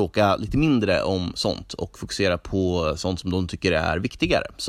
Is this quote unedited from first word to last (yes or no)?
yes